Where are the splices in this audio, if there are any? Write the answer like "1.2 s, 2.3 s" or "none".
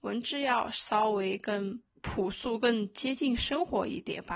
1.9 s